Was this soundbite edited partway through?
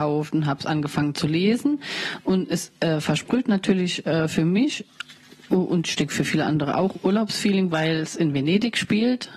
no; 0 cuts

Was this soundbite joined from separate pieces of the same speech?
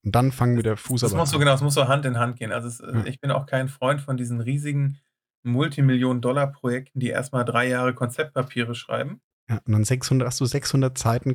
no; 0 cuts

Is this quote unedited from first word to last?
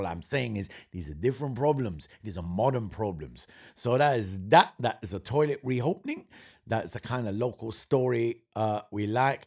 yes; 0 cuts

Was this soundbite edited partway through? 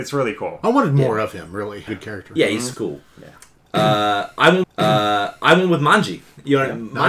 yes; 3 cuts; at 1.9 s, 2.7 s, 4.6 s

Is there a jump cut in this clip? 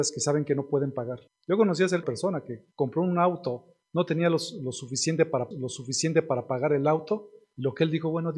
yes; 3 cuts; at 1.3 s, 2.0 s, 5.5 s

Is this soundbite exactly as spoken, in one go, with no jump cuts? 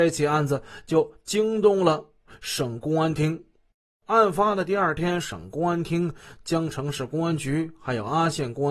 yes; 0 cuts

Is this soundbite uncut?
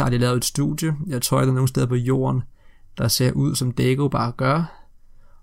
yes; 0 cuts

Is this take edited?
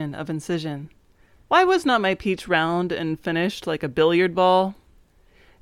no; 0 cuts

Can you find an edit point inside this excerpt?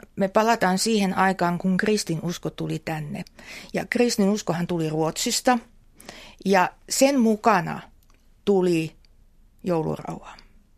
no; 0 cuts

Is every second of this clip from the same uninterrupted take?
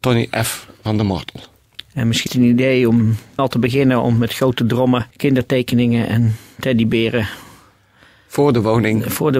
no; 3 cuts; at 2.3 s, 3.4 s, 5.1 s

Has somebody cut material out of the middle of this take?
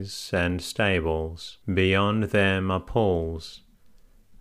yes; 1 cut; at 1.6 s

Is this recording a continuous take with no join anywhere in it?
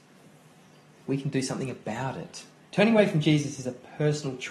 no; 1 cut; at 2.6 s

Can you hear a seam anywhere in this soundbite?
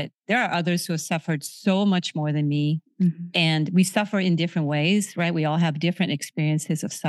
no; 0 cuts

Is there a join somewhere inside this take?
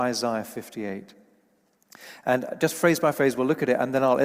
no; 0 cuts

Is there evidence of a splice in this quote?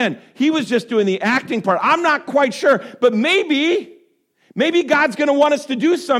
no; 0 cuts

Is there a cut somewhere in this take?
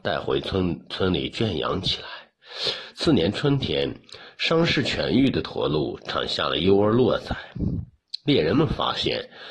no; 0 cuts

